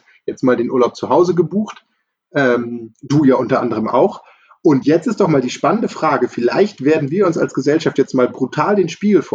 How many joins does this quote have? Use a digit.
0